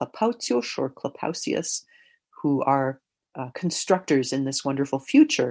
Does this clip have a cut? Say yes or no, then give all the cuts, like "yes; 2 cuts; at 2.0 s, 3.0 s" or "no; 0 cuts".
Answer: no; 0 cuts